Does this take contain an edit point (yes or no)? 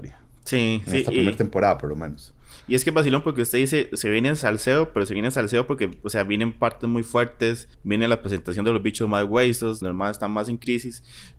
yes